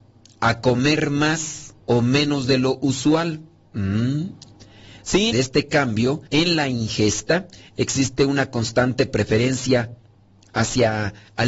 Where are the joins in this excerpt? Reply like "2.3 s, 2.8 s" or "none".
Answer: 1.8 s, 5.3 s, 6.3 s